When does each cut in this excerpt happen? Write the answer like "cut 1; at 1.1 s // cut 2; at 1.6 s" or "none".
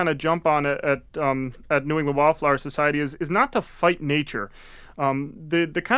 none